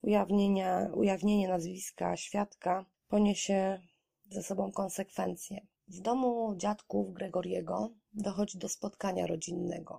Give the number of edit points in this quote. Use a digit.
1